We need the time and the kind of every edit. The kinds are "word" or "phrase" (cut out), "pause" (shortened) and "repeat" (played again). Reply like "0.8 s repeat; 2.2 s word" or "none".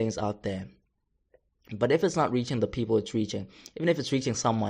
none